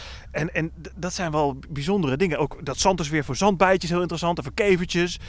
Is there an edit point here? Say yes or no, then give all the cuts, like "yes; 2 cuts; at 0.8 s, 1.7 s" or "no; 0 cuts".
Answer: no; 0 cuts